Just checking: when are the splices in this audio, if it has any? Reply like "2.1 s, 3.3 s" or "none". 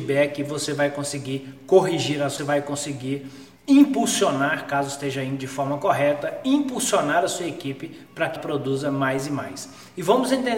2.4 s, 8.4 s